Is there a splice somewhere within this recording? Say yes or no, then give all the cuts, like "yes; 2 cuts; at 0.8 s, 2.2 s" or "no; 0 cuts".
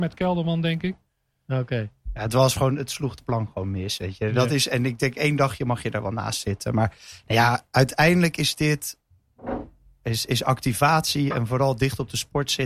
no; 0 cuts